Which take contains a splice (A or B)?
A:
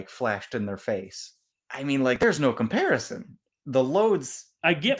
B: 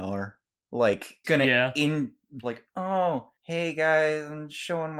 B